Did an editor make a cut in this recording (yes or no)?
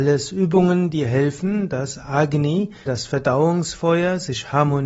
yes